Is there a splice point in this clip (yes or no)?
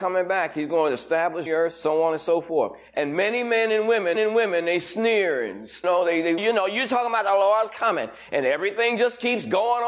yes